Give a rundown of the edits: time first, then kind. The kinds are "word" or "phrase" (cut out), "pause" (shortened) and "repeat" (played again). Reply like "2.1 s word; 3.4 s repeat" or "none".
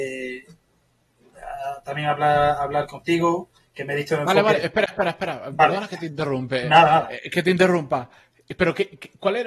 none